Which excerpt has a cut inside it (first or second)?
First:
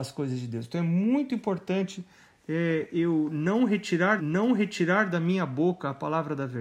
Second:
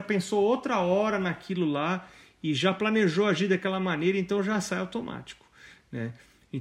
first